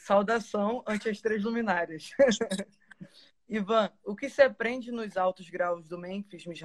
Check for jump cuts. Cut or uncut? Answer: uncut